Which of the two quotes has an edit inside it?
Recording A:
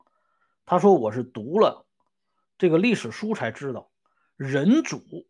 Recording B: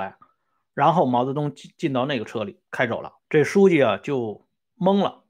B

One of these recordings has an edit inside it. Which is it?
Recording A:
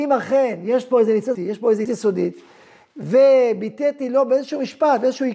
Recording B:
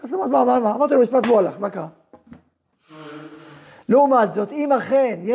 A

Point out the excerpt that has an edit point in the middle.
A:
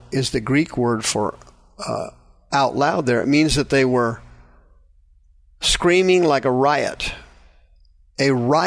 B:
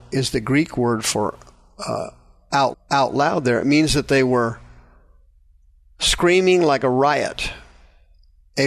B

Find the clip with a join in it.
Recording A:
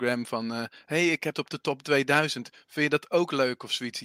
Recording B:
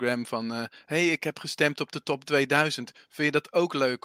A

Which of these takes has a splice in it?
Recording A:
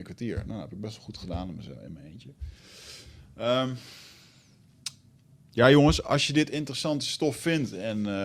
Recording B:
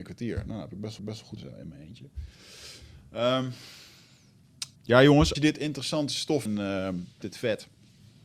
B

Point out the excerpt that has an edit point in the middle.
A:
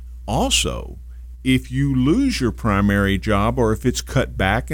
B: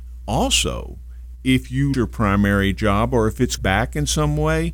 B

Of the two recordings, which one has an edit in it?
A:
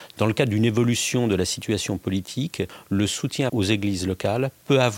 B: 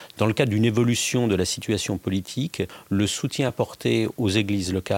A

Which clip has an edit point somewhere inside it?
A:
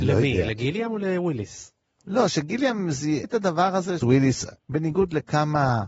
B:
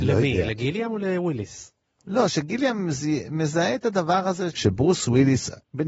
A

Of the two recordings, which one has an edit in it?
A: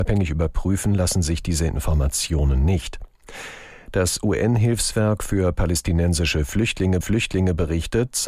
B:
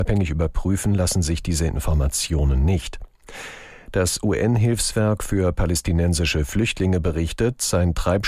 A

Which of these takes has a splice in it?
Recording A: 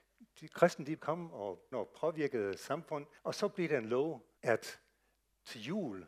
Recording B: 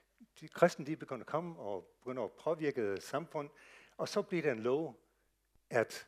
A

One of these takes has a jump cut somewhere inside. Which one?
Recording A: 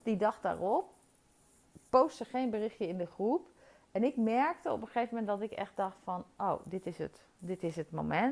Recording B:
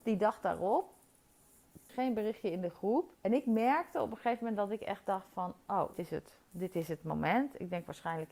B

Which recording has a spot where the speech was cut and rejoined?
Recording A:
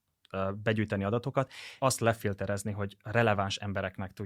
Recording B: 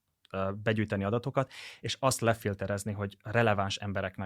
A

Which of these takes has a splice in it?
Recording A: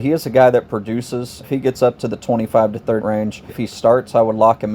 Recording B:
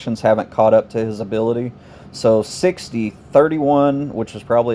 A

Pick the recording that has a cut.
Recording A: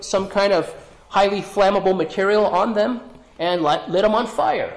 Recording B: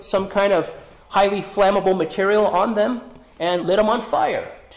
B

